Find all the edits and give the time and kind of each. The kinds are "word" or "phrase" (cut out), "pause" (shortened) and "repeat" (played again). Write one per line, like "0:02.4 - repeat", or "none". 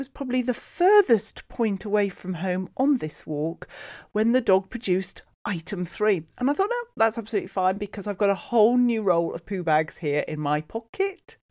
none